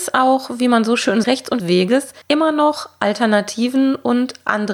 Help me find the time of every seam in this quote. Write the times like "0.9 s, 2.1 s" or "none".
1.2 s, 1.6 s, 2.2 s